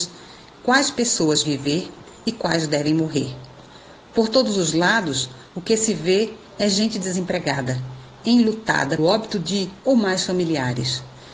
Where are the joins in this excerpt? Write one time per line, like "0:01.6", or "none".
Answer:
0:01.4
0:09.0
0:09.8